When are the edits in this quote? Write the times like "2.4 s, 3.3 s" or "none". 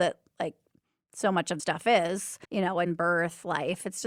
1.6 s, 2.4 s